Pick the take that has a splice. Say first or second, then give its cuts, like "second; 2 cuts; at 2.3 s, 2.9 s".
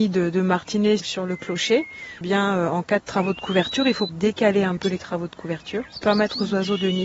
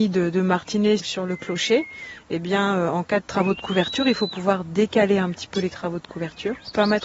first; 3 cuts; at 2.2 s, 4.1 s, 4.8 s